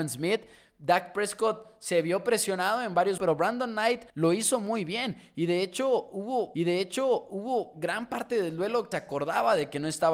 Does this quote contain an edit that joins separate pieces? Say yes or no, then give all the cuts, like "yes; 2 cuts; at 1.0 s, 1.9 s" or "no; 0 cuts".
yes; 4 cuts; at 3.2 s, 4.1 s, 6.5 s, 8.9 s